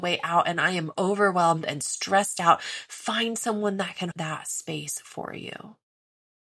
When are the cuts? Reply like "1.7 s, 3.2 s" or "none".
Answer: 4.1 s